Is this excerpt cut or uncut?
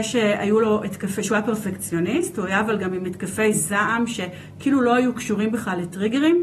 uncut